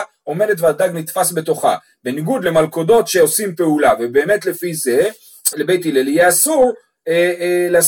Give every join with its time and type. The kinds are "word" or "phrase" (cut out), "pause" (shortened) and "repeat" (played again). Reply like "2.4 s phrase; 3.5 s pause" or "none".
5.5 s word